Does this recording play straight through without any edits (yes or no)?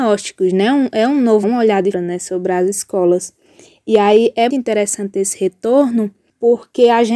no